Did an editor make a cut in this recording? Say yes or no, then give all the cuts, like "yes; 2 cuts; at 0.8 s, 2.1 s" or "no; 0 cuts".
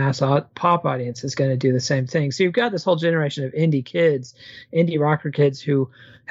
no; 0 cuts